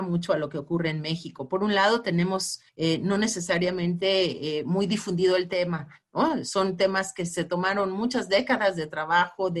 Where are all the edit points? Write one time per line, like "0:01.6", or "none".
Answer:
0:02.7